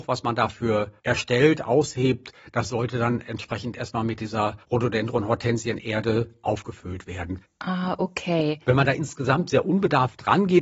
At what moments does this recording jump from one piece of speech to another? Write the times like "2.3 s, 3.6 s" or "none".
1.0 s, 4.6 s